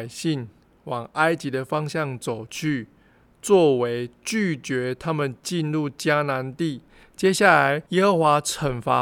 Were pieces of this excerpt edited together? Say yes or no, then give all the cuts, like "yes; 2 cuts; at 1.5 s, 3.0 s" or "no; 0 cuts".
yes; 2 cuts; at 6.9 s, 7.9 s